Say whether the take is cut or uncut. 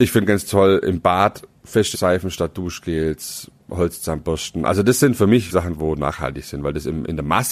cut